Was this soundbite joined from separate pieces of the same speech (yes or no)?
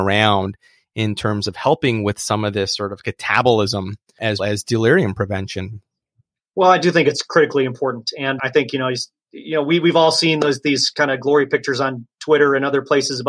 yes